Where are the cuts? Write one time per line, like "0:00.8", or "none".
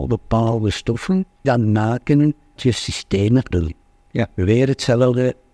0:01.4
0:02.6
0:03.5